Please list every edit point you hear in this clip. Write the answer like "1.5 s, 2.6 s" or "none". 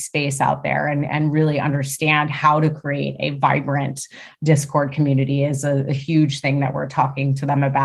none